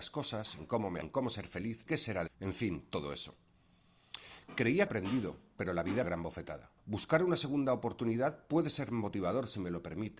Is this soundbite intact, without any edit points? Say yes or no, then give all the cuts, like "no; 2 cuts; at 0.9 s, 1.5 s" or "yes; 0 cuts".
no; 6 cuts; at 1.0 s, 1.9 s, 2.3 s, 4.9 s, 6.0 s, 6.8 s